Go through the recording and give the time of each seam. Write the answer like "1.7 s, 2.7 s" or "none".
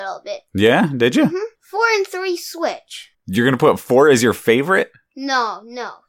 1.6 s, 3.1 s